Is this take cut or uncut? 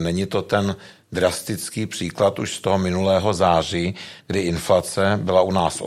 uncut